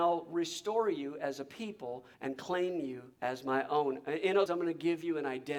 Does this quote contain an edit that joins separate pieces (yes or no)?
yes